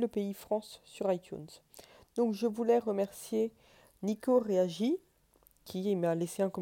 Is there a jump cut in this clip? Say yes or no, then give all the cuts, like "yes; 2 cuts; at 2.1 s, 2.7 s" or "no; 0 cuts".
no; 0 cuts